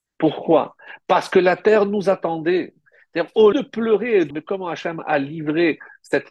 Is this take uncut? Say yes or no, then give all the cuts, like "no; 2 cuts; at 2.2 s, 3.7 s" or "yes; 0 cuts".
no; 2 cuts; at 3.5 s, 4.3 s